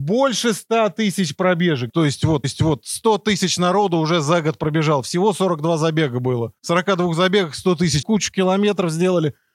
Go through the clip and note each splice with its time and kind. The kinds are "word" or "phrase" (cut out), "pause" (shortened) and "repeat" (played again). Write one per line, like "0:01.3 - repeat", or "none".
0:01.9 - word
0:02.4 - repeat
0:06.6 - pause
0:08.0 - phrase